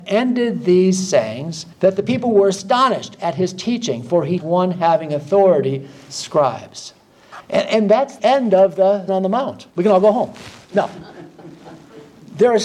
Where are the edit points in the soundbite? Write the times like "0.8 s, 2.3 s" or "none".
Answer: 1.7 s, 4.4 s, 6.1 s, 8.2 s, 9.1 s, 9.7 s